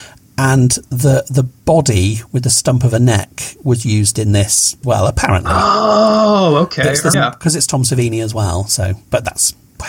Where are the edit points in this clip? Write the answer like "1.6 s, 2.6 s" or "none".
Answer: 4.8 s, 7.1 s

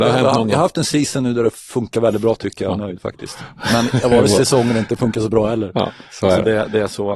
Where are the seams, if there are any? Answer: none

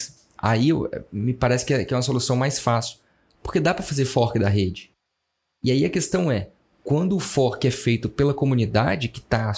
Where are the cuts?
none

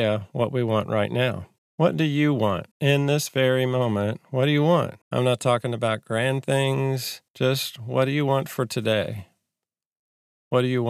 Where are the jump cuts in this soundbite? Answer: 1.6 s, 2.7 s, 5.0 s, 7.3 s

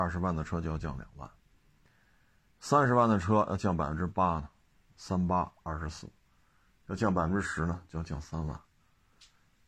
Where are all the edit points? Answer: none

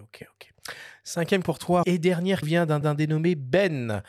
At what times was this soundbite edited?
1.4 s, 1.8 s, 2.4 s, 2.8 s

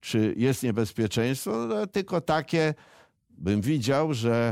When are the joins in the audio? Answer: none

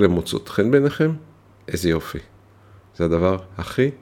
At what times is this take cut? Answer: none

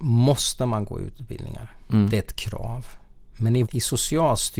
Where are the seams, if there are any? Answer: 3.6 s

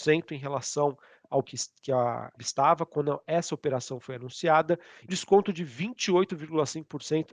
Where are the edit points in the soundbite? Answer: 1.4 s, 2.4 s, 5.1 s

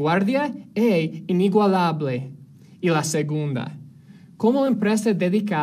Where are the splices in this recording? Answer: none

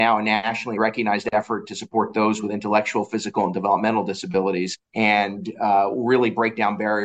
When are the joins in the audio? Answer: 4.8 s

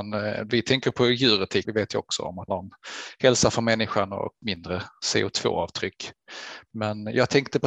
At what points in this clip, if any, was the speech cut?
1.7 s, 2.5 s, 4.4 s

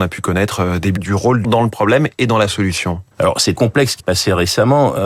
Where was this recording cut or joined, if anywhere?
1.0 s, 1.4 s, 3.1 s, 3.5 s, 4.0 s

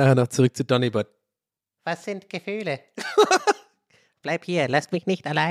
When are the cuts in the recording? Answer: none

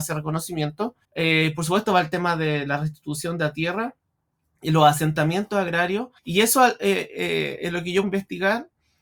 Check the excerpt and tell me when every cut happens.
1.0 s, 6.2 s, 8.0 s

